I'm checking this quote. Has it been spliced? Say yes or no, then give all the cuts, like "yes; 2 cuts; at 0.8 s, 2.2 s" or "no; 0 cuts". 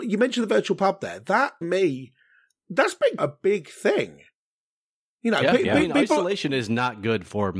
yes; 2 cuts; at 1.6 s, 3.2 s